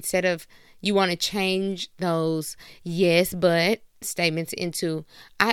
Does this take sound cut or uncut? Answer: uncut